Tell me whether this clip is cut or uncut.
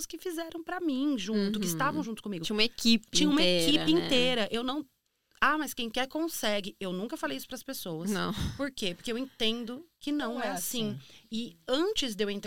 uncut